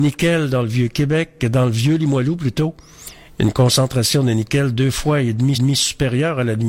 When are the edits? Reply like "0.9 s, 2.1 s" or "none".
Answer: 5.5 s